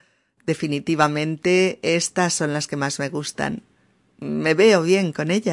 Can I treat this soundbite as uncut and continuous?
yes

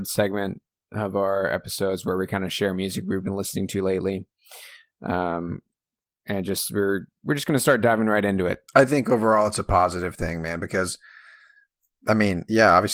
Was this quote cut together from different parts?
yes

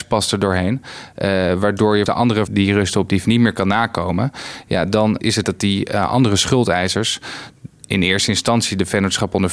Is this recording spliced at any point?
yes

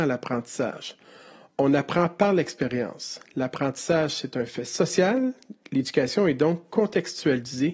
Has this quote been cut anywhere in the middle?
no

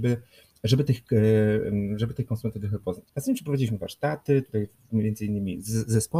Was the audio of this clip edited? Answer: yes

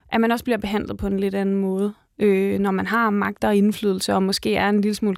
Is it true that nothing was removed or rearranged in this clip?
yes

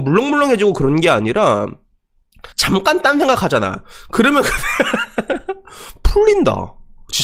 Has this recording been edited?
yes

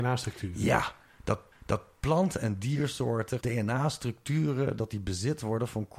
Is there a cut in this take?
yes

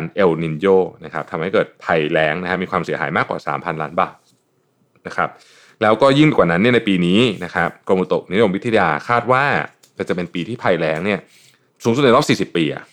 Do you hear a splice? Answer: no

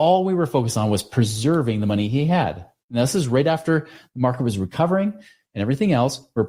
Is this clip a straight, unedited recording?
yes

